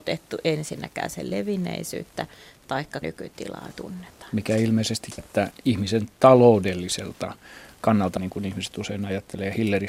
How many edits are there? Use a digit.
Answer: 5